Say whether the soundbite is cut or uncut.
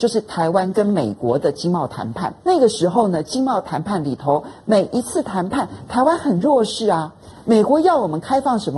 cut